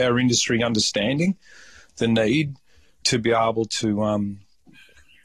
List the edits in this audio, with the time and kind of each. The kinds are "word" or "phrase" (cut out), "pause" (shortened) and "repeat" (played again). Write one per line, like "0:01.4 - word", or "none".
0:03.0 - word